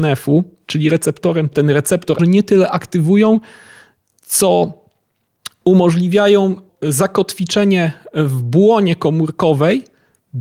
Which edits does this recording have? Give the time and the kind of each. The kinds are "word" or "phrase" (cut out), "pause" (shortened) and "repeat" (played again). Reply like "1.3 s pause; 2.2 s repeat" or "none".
1.5 s phrase; 2.2 s word; 6.7 s word